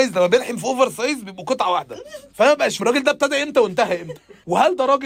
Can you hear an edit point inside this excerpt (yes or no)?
yes